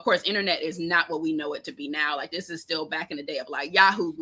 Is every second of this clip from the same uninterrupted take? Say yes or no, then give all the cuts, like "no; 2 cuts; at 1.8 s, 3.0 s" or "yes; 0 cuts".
yes; 0 cuts